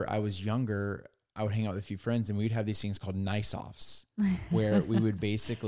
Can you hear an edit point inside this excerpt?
no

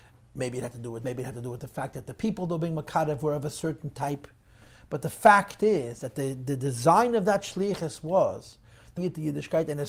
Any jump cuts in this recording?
yes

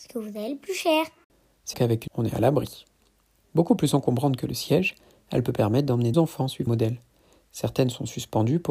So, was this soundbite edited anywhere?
yes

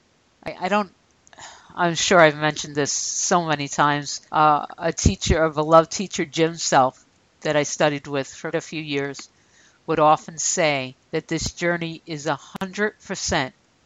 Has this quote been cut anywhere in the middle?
yes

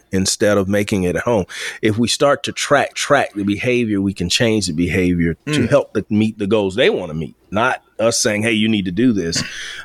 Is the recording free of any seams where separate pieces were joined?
no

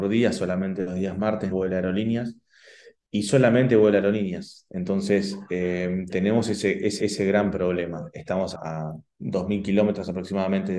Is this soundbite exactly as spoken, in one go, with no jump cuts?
no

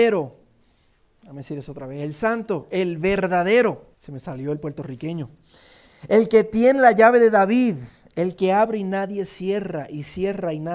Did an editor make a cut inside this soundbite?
yes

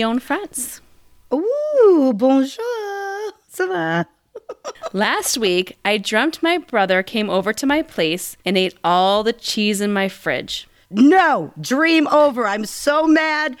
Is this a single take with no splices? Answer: no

